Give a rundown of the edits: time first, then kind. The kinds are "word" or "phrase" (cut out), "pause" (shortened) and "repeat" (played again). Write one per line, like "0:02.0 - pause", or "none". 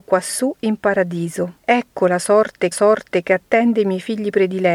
0:01.6 - pause
0:02.7 - repeat